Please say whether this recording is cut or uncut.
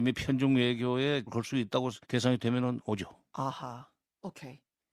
cut